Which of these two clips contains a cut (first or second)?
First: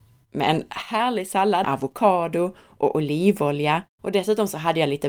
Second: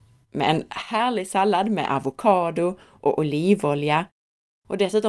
first